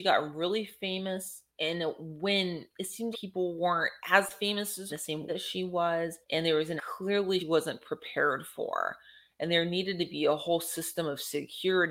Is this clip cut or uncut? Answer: cut